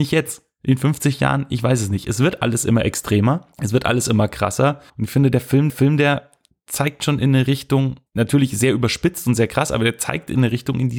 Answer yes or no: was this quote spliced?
yes